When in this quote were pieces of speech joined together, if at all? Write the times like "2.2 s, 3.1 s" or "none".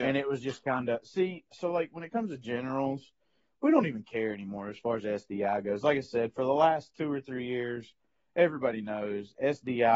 none